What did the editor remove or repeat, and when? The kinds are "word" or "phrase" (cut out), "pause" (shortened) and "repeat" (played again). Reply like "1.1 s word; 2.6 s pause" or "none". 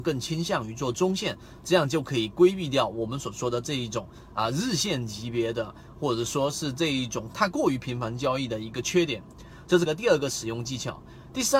9.9 s word